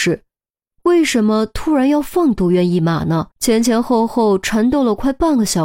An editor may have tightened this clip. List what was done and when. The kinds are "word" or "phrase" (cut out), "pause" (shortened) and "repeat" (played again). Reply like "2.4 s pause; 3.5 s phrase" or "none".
3.3 s pause